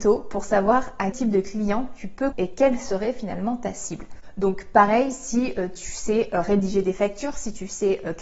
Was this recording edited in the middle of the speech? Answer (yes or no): yes